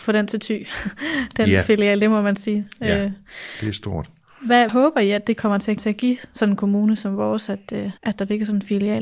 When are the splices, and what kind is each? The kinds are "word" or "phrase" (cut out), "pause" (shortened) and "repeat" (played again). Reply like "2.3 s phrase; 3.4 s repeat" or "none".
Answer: 4.7 s word; 5.8 s repeat; 8.0 s pause